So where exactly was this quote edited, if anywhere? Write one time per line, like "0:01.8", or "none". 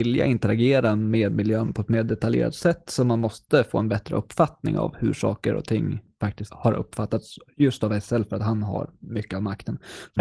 none